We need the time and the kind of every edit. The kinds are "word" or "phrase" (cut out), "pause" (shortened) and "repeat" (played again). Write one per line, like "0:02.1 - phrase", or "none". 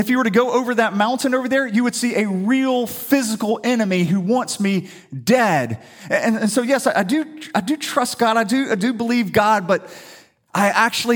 none